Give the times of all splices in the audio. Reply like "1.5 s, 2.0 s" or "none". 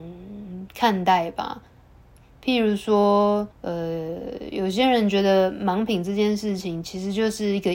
3.5 s